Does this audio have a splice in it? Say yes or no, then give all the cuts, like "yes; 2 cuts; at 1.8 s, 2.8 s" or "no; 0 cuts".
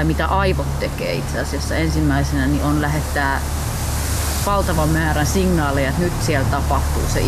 no; 0 cuts